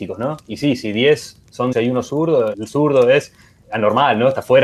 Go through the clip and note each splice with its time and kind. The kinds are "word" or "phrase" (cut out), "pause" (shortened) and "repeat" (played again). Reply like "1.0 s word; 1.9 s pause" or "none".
1.7 s word; 2.5 s word; 3.6 s word